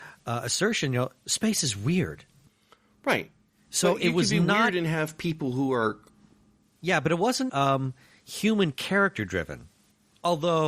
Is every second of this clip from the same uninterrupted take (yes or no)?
no